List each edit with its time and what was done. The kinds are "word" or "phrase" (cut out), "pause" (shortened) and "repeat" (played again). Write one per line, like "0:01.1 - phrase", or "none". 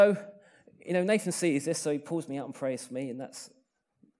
none

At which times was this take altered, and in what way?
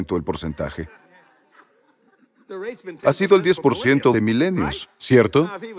0:04.1 - word

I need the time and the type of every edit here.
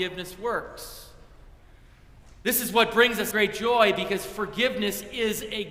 0:03.3 - word

